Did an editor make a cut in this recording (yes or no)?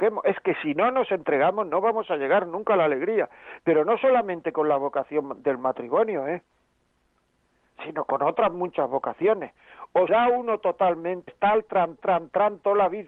yes